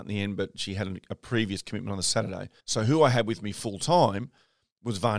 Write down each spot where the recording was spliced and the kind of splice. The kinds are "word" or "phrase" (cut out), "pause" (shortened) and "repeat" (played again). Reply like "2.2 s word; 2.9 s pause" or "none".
2.6 s pause